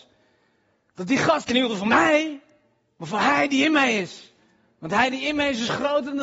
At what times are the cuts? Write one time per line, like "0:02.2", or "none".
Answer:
0:01.4